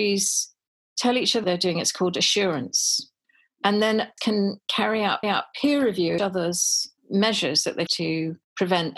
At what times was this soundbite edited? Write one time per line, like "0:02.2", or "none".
0:01.4
0:03.2
0:04.2
0:05.2
0:06.2
0:07.0
0:07.9